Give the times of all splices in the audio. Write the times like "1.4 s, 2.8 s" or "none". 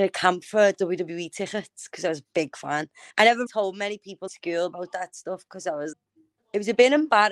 3.1 s, 3.5 s, 4.3 s, 5.9 s